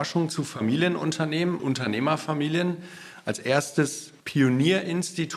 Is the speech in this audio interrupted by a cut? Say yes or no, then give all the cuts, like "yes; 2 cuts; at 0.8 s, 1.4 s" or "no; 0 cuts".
yes; 2 cuts; at 1.6 s, 4.2 s